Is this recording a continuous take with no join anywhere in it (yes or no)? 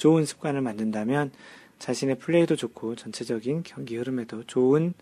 yes